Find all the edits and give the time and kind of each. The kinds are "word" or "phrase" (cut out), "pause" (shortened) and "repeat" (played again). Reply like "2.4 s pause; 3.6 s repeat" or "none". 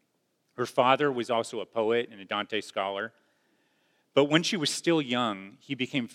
none